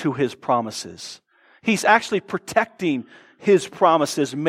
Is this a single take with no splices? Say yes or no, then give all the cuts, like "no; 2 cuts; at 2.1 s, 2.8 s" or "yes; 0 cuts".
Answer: yes; 0 cuts